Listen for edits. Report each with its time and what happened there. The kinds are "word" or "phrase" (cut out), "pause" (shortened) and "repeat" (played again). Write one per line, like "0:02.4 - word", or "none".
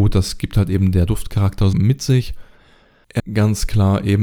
0:01.7 - word
0:03.2 - word